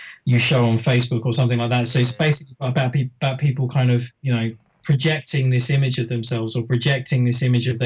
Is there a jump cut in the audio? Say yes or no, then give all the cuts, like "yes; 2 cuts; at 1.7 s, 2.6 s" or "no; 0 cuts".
no; 0 cuts